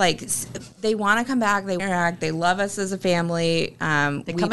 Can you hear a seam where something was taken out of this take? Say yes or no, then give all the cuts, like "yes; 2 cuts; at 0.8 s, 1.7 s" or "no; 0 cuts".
yes; 1 cut; at 1.8 s